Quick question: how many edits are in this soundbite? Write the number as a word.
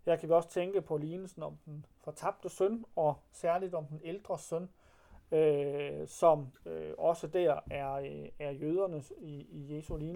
two